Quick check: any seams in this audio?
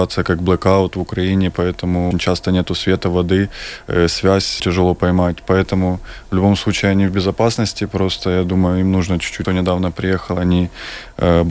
yes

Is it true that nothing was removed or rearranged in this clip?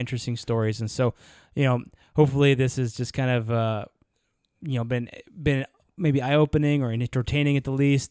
yes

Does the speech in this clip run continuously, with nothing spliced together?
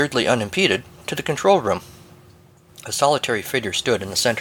yes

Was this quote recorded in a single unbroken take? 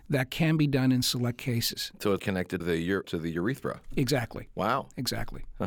no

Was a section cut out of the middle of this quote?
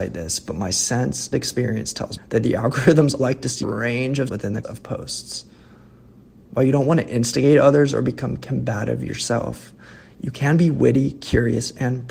yes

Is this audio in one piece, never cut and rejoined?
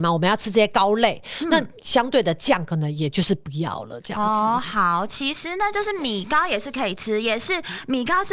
yes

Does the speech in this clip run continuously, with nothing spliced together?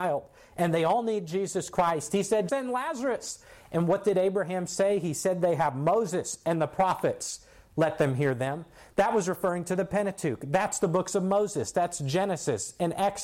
no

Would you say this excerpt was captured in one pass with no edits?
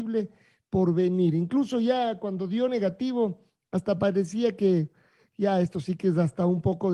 yes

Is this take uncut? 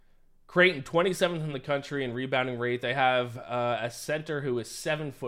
yes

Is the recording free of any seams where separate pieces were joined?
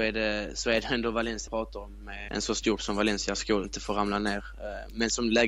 no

